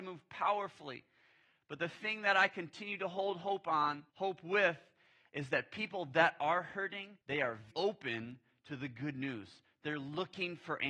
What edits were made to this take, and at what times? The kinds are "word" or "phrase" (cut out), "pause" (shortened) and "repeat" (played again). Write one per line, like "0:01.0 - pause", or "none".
0:04.1 - pause
0:07.2 - pause
0:07.7 - word